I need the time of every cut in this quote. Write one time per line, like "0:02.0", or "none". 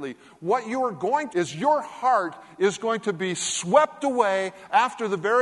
0:01.3